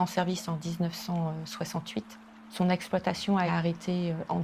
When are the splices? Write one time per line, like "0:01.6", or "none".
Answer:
0:03.5